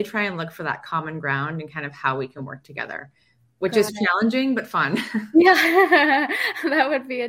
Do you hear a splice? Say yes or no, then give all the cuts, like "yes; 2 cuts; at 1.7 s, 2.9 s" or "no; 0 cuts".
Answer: no; 0 cuts